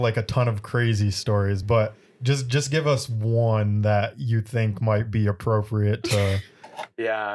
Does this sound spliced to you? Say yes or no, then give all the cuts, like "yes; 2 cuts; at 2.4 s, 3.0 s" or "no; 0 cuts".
no; 0 cuts